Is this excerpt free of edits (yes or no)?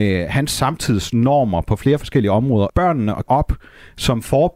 no